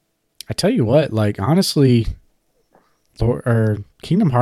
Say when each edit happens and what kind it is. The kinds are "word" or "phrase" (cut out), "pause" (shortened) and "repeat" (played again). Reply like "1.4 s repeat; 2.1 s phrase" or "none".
none

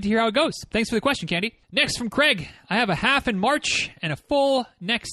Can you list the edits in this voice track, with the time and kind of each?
1.6 s pause

